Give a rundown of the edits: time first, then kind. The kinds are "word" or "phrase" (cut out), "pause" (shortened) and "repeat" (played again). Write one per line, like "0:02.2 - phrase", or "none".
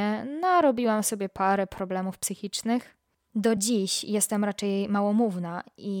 none

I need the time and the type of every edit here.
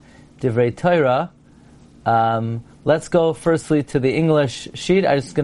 none

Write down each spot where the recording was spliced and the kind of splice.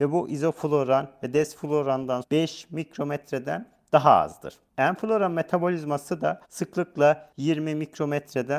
0:02.2 - word
0:06.4 - pause

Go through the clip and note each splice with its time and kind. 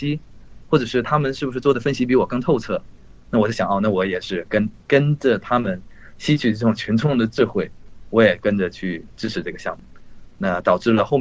0:04.8 - pause

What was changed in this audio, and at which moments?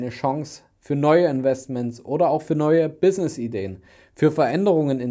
none

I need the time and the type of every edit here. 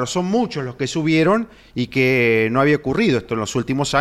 none

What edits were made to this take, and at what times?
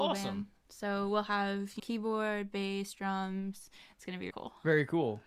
0:01.8 - word
0:04.3 - word

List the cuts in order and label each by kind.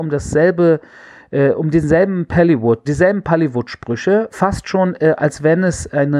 0:02.9 - word

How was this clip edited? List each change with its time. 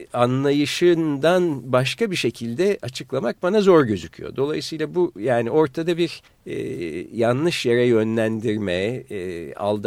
0:06.3 - pause

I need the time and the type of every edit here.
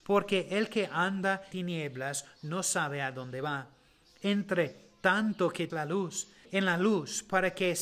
0:01.5 - word
0:05.7 - word
0:06.5 - word

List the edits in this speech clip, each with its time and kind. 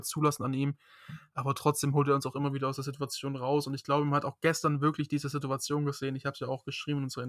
none

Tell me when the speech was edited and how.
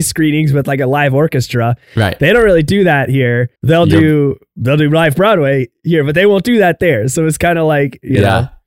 0:03.6 - pause

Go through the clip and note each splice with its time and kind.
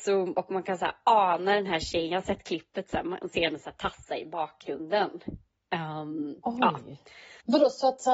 none

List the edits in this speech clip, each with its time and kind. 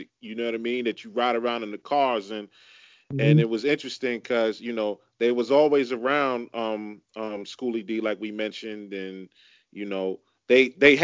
none

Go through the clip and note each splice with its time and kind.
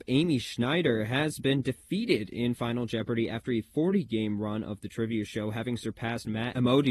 none

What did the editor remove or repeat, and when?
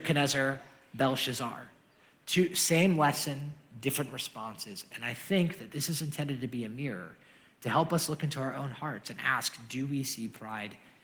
none

